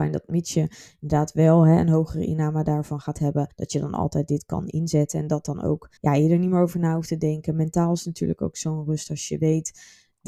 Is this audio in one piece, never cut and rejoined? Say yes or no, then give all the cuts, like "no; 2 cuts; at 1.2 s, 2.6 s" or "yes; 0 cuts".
no; 2 cuts; at 3.5 s, 6.0 s